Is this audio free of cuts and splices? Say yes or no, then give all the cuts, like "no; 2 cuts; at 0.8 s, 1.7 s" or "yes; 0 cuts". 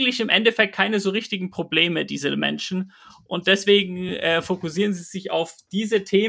yes; 0 cuts